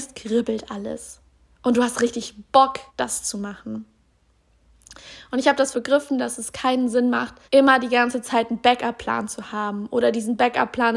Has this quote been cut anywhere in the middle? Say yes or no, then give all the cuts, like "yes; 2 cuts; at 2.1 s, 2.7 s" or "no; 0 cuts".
yes; 3 cuts; at 2.9 s, 5.7 s, 7.4 s